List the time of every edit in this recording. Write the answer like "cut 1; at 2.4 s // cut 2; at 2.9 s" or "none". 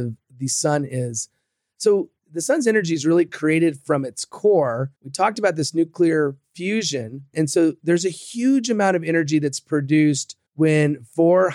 cut 1; at 2.2 s // cut 2; at 5.0 s // cut 3; at 10.5 s